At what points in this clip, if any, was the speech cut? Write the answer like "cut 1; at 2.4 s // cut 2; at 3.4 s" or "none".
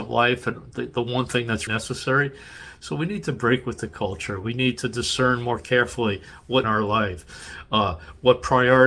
cut 1; at 1.7 s // cut 2; at 6.6 s